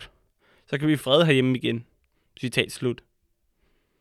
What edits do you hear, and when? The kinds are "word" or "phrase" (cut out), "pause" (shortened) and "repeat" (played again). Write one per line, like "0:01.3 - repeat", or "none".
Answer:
0:01.0 - word

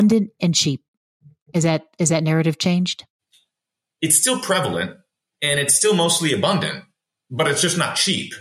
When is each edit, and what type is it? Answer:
none

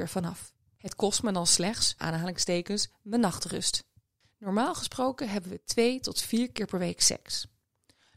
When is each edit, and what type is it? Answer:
0:02.0 - word
0:04.0 - pause

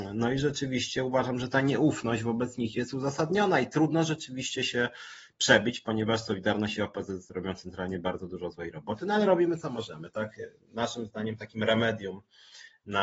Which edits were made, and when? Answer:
none

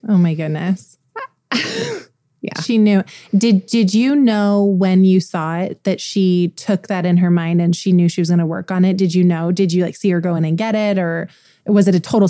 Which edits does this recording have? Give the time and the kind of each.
none

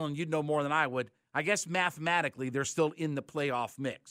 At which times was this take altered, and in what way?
none

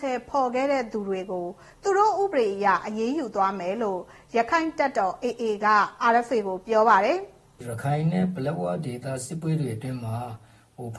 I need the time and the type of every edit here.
none

